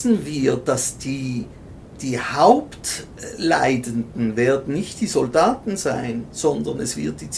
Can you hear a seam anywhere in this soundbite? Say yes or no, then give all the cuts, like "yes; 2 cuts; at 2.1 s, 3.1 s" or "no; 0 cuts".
no; 0 cuts